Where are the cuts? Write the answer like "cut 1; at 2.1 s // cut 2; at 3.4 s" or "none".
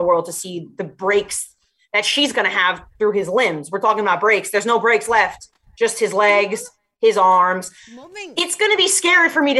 none